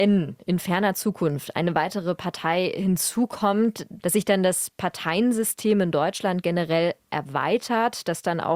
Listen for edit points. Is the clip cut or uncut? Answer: uncut